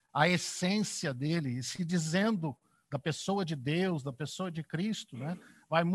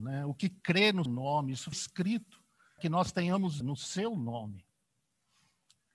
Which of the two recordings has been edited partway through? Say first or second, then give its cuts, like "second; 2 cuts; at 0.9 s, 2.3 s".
second; 4 cuts; at 1.1 s, 1.7 s, 2.8 s, 3.6 s